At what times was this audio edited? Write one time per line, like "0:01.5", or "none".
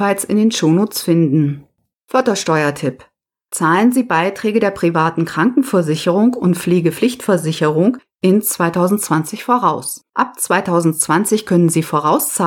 0:01.9
0:10.1